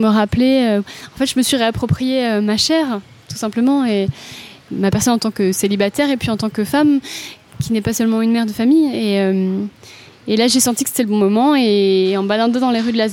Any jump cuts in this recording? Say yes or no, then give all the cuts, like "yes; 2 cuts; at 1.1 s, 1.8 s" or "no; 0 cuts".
no; 0 cuts